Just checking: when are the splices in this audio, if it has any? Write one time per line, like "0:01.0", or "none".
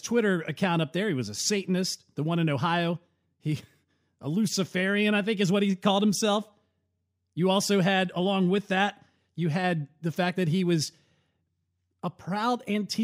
none